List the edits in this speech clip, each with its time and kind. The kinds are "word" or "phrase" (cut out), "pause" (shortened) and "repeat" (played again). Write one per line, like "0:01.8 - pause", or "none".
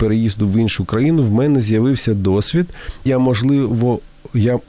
0:03.1 - word